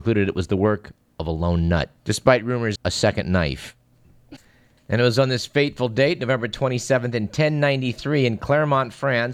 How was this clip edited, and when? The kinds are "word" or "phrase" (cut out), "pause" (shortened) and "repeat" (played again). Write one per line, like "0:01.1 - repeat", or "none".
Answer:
0:02.0 - pause
0:02.8 - word